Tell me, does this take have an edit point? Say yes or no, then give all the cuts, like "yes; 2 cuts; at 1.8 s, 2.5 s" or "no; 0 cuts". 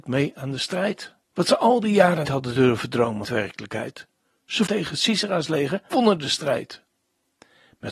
yes; 5 cuts; at 1.2 s, 2.2 s, 3.2 s, 4.7 s, 5.9 s